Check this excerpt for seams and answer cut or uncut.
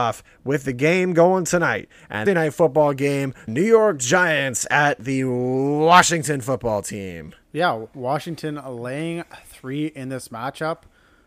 cut